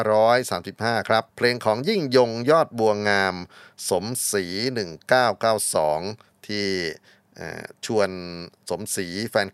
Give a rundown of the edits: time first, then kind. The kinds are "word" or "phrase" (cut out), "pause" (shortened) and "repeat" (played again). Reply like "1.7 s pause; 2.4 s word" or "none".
1.3 s pause